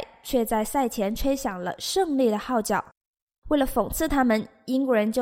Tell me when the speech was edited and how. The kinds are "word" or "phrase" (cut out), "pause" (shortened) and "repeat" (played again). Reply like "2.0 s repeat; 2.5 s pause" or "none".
none